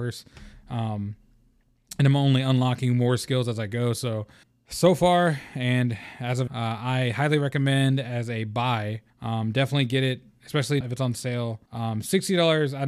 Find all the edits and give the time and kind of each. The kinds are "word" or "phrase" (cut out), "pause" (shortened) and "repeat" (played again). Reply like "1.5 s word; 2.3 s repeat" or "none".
4.4 s pause; 6.5 s word; 9.1 s pause; 10.8 s word; 11.7 s pause